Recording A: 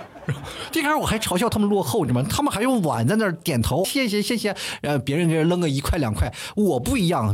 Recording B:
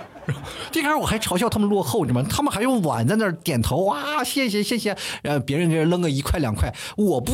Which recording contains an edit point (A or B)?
A